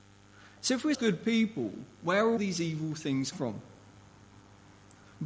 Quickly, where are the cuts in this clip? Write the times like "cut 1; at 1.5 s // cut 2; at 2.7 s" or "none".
cut 1; at 0.9 s // cut 2; at 2.4 s // cut 3; at 3.3 s